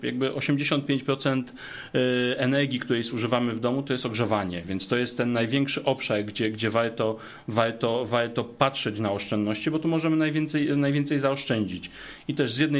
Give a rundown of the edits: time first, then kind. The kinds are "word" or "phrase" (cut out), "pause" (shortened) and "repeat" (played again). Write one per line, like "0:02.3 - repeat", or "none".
none